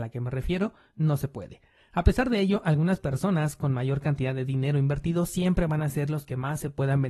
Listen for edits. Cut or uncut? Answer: uncut